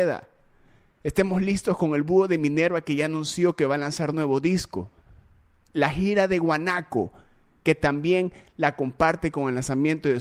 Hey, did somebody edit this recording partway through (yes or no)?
no